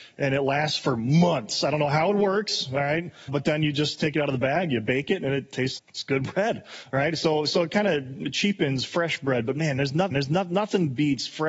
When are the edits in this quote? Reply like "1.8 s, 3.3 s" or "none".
3.3 s, 5.8 s, 10.1 s